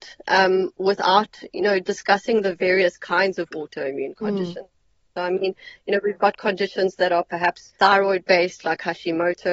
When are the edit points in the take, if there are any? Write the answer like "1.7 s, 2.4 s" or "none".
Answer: 7.7 s